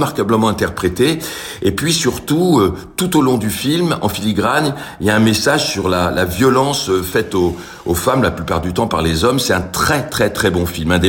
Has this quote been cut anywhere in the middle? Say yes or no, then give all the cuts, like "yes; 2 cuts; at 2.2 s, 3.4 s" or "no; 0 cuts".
no; 0 cuts